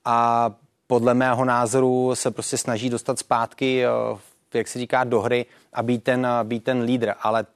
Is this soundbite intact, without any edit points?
yes; 0 cuts

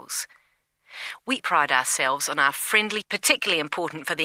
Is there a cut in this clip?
yes; 2 cuts; at 1.4 s, 3.0 s

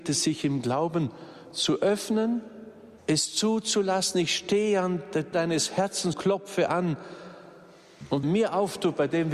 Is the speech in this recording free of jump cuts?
no; 4 cuts; at 3.0 s, 5.3 s, 6.1 s, 8.2 s

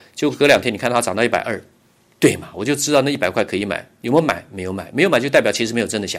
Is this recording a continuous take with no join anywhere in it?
yes; 0 cuts

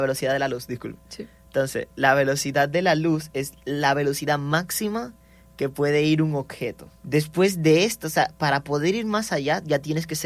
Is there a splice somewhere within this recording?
yes; 1 cut; at 7.0 s

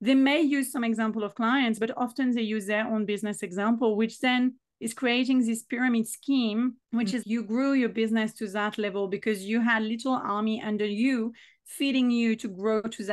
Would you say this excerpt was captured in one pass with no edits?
no; 2 cuts; at 6.8 s, 7.2 s

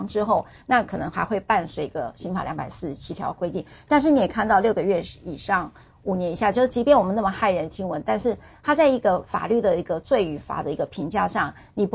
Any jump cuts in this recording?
no; 0 cuts

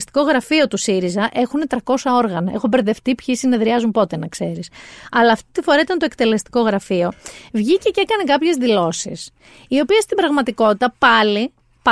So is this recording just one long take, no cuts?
yes; 0 cuts

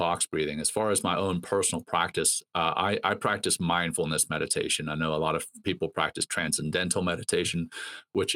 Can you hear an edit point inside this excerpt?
no; 0 cuts

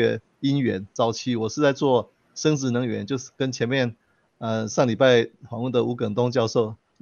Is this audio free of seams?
yes; 0 cuts

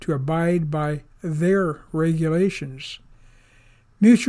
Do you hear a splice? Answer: no; 0 cuts

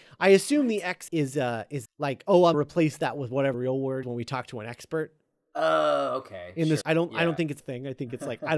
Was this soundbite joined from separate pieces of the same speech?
yes; 7 cuts; at 1.1 s, 1.8 s, 2.5 s, 3.5 s, 4.0 s, 6.8 s, 7.6 s

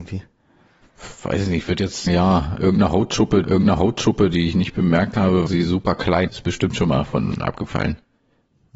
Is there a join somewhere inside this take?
yes; 4 cuts; at 2.1 s, 3.4 s, 5.5 s, 6.3 s

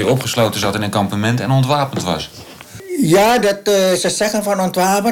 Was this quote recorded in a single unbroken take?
yes; 0 cuts

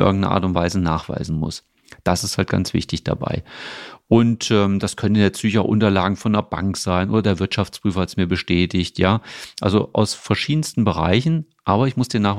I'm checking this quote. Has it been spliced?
no; 0 cuts

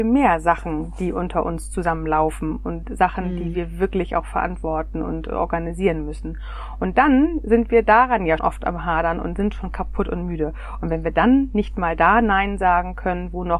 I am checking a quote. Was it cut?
yes; 1 cut; at 8.4 s

